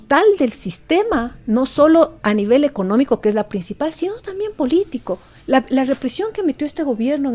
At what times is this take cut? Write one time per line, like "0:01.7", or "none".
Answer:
none